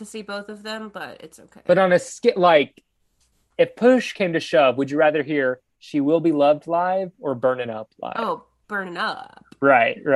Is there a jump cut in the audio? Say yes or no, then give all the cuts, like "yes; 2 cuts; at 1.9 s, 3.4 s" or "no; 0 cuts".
no; 0 cuts